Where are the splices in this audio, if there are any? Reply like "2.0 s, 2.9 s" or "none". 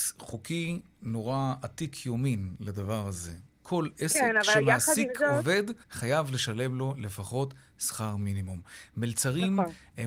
5.8 s